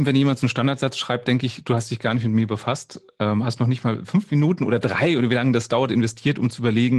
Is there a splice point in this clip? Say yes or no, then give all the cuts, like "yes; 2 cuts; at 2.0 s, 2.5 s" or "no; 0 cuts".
no; 0 cuts